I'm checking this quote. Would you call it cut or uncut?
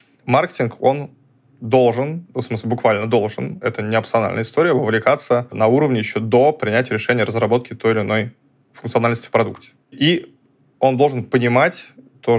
uncut